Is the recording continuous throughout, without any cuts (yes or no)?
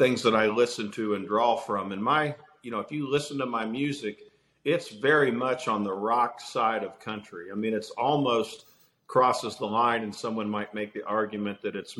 yes